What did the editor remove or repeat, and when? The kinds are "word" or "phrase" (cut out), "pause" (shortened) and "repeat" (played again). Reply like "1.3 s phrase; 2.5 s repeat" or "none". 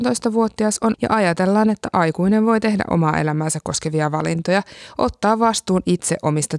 0.9 s word

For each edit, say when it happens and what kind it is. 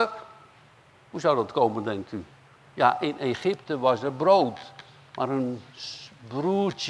none

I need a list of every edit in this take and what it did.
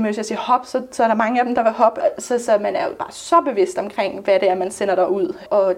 none

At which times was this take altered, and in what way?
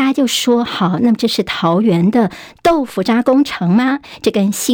none

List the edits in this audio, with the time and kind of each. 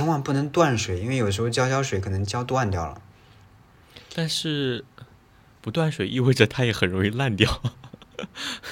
none

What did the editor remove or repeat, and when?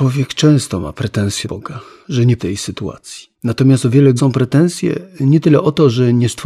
1.4 s phrase; 2.4 s phrase; 3.3 s pause; 4.2 s word

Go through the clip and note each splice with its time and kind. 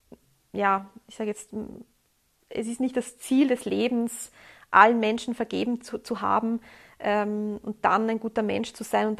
none

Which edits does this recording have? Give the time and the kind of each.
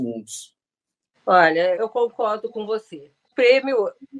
1.8 s word; 3.3 s word

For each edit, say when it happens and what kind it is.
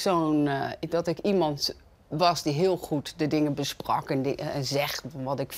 none

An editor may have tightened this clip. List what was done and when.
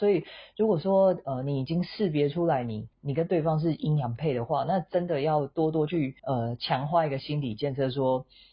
2.9 s pause; 6.2 s pause

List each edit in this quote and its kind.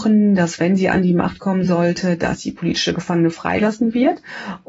none

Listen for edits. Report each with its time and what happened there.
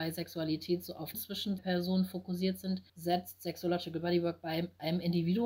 1.1 s word; 1.6 s word; 2.9 s pause

